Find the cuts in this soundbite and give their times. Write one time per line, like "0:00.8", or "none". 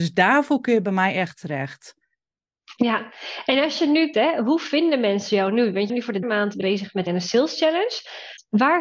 0:04.1
0:05.9
0:06.2
0:06.6
0:07.1